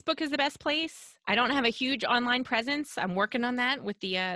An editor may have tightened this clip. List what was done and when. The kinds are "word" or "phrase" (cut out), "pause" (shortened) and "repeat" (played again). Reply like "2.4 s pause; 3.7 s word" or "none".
none